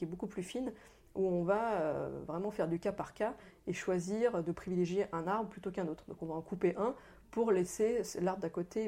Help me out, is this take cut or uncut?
uncut